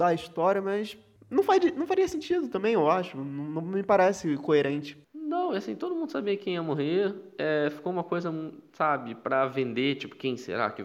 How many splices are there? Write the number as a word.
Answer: two